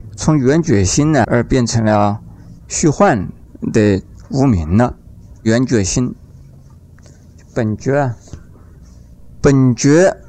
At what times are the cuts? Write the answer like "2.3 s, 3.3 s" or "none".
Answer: 1.2 s